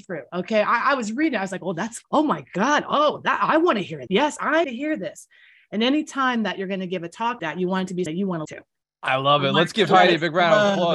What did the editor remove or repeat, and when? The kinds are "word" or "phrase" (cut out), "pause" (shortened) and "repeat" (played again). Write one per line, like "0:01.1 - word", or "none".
0:02.0 - word
0:04.1 - word
0:04.6 - word
0:07.4 - word
0:08.1 - word
0:08.4 - word